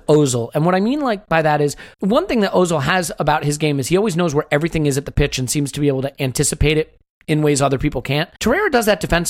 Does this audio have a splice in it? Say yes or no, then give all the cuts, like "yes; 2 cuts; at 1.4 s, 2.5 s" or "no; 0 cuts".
yes; 2 cuts; at 1.9 s, 8.4 s